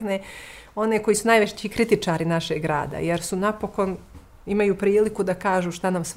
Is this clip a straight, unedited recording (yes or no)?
yes